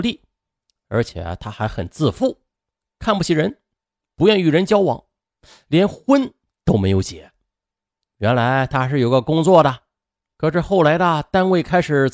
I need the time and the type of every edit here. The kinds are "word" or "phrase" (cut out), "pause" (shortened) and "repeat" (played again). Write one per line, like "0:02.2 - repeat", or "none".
none